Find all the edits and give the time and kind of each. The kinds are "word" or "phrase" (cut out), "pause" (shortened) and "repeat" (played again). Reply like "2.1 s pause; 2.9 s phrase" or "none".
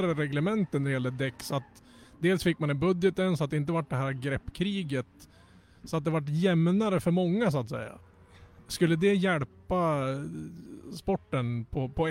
none